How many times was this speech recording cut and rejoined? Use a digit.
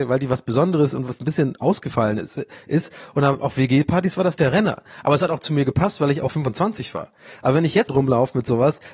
3